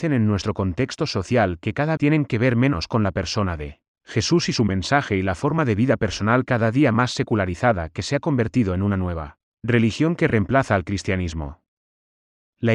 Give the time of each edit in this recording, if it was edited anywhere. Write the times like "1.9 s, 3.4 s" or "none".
2.0 s